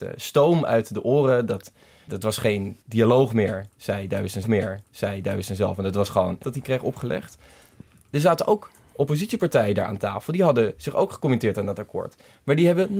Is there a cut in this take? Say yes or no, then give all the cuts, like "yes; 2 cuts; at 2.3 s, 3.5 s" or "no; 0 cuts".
yes; 4 cuts; at 2.1 s, 2.8 s, 4.4 s, 6.4 s